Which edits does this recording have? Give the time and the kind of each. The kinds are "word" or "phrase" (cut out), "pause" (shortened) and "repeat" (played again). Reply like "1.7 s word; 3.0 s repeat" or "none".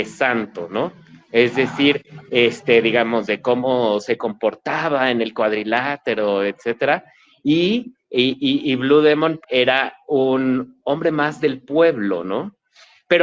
8.4 s word; 9.4 s word